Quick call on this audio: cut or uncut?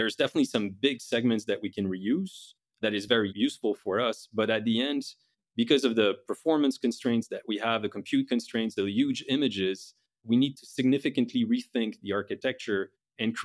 uncut